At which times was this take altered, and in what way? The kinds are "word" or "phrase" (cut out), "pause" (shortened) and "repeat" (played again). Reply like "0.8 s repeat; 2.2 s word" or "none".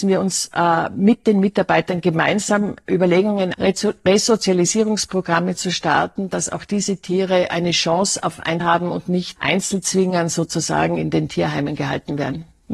3.5 s phrase; 8.6 s word; 9.4 s word